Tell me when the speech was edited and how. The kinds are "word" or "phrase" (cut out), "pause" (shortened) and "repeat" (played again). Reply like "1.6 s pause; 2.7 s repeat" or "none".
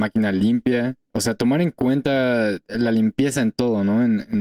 1.1 s pause